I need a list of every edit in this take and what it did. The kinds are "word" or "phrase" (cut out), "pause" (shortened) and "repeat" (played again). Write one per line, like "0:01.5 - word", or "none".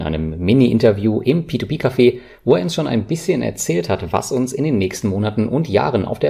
none